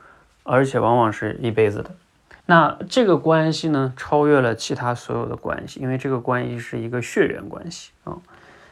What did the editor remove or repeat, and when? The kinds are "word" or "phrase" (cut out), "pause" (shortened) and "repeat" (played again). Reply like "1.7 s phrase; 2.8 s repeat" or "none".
2.4 s pause

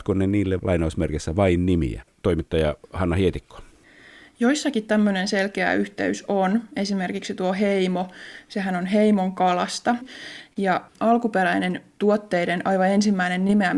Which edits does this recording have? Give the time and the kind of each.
none

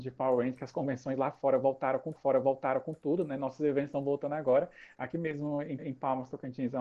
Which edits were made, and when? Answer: 2.1 s repeat; 5.8 s repeat

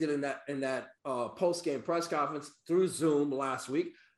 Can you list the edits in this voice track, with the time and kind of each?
1.0 s pause

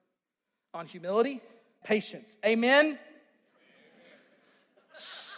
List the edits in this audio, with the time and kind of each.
1.8 s phrase

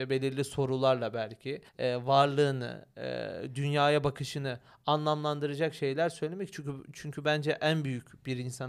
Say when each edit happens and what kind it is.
1.7 s pause

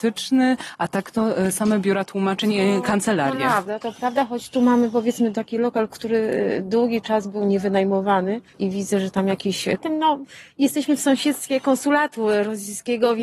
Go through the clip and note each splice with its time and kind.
8.5 s pause; 9.8 s phrase

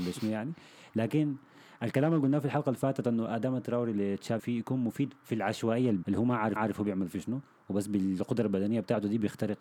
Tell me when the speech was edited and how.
4.4 s word; 6.0 s word; 6.6 s repeat

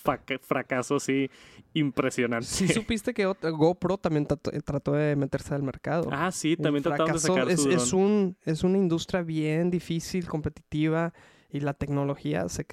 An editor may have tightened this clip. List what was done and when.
none

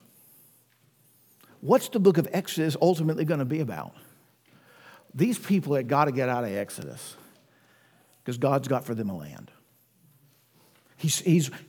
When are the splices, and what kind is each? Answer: none

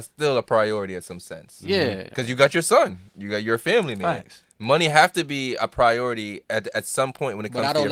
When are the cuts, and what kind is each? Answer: 6.4 s pause

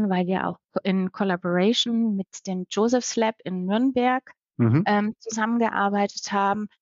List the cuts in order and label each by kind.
none

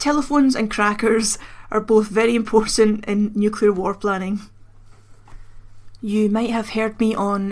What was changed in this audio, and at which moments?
none

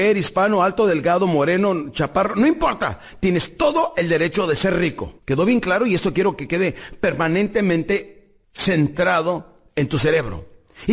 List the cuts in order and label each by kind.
5.2 s pause; 8.4 s pause

